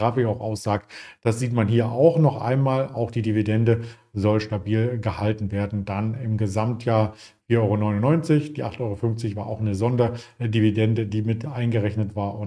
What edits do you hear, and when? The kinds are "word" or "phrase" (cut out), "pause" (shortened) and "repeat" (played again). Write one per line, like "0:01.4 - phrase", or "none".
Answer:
none

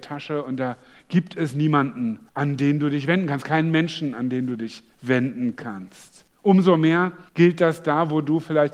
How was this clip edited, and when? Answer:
0:02.3 - pause
0:04.9 - pause
0:06.3 - pause
0:07.3 - pause

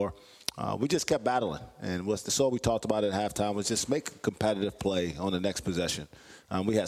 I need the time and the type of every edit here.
none

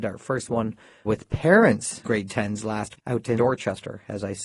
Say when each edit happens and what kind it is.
0:01.0 - word
0:02.0 - word
0:03.0 - word
0:03.4 - word

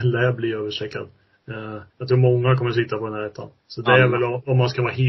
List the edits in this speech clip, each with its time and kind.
0:01.9 - pause
0:03.6 - pause

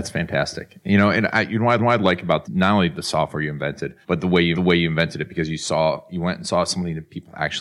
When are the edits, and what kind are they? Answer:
0:01.8 - repeat
0:02.4 - phrase
0:04.0 - pause
0:04.5 - repeat

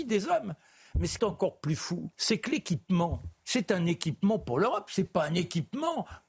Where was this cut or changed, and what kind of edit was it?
0:01.2 - word
0:02.1 - pause
0:03.4 - pause

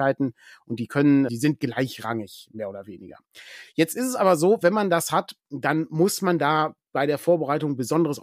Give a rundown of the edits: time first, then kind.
0:01.3 - word
0:05.4 - pause

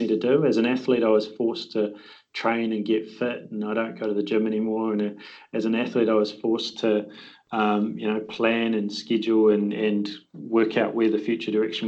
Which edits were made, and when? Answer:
none

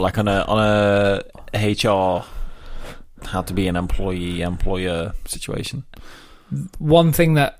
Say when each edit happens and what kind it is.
none

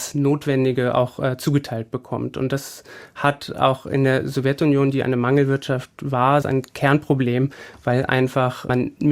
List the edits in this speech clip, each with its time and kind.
0:06.4 - phrase

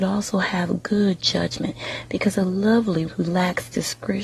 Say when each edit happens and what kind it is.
0:03.1 - word

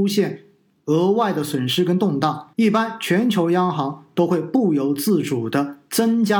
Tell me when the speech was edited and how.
0:02.5 - pause

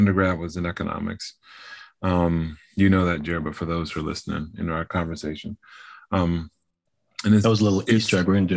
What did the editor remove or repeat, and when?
none

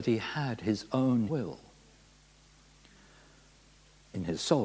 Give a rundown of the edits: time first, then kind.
0:01.3 - word

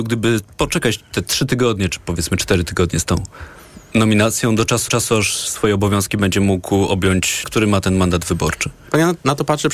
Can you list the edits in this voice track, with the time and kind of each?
0:04.9 - repeat
0:07.4 - phrase

